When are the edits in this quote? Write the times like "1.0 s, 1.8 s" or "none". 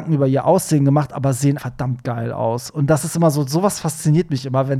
1.6 s